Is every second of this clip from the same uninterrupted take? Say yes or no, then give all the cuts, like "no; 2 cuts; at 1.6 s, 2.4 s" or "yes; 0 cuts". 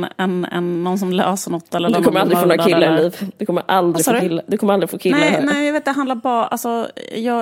yes; 0 cuts